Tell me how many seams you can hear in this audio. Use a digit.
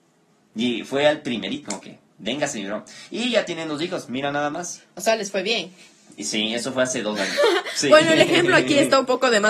1